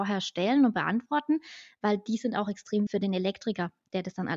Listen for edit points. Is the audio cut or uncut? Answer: cut